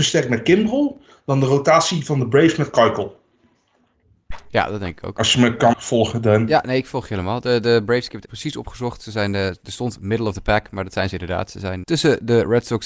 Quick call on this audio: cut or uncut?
cut